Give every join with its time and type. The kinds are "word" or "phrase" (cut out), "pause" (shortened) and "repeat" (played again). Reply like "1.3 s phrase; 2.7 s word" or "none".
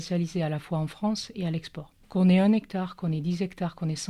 2.0 s pause